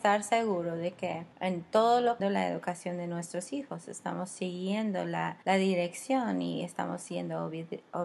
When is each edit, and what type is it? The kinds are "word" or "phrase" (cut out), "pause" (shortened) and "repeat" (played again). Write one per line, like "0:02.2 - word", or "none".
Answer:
0:01.3 - pause
0:02.2 - phrase
0:05.4 - pause